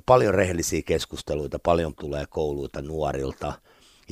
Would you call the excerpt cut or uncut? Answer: cut